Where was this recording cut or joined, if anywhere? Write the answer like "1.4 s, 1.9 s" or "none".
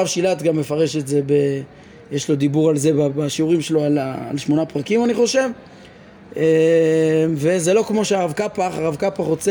none